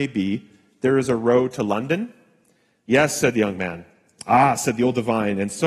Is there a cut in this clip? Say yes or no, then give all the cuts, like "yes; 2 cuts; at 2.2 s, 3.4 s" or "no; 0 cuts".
no; 0 cuts